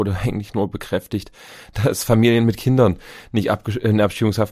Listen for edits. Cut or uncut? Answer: uncut